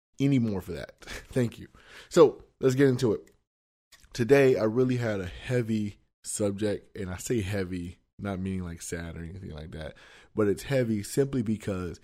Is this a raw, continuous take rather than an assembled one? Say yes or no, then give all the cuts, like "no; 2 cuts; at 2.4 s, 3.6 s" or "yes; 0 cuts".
yes; 0 cuts